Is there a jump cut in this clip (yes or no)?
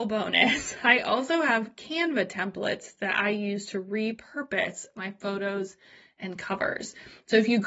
no